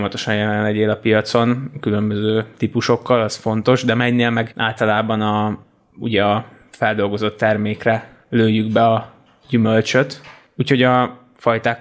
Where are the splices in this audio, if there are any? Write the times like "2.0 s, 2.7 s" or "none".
none